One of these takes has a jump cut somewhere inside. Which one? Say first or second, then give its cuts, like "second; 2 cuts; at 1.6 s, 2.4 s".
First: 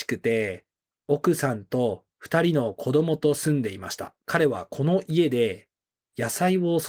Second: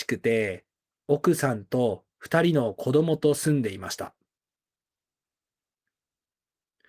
first; 1 cut; at 4.2 s